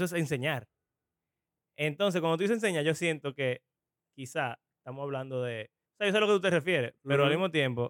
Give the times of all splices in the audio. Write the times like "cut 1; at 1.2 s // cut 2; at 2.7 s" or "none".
cut 1; at 3.8 s // cut 2; at 5.9 s